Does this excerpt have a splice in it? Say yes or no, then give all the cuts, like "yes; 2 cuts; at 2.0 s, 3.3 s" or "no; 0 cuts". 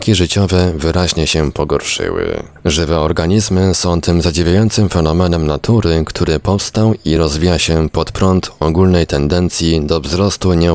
no; 0 cuts